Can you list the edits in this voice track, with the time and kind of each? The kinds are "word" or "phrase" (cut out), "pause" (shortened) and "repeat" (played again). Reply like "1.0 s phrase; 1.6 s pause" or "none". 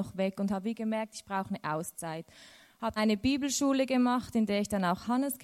3.0 s word

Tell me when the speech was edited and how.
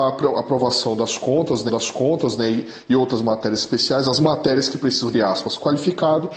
1.7 s repeat; 5.1 s phrase

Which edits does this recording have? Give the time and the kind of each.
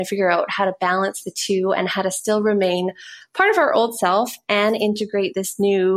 none

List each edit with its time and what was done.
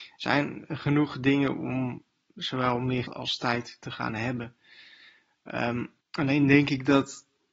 3.1 s word; 6.0 s pause

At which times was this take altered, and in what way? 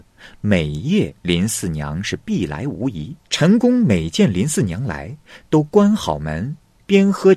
1.2 s pause; 3.2 s pause

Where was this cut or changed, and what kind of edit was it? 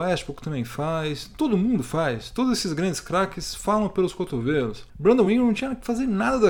none

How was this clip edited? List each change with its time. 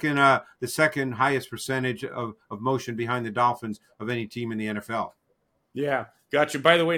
none

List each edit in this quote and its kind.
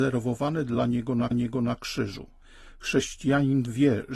1.3 s repeat

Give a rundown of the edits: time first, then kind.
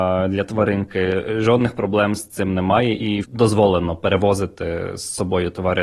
3.2 s phrase

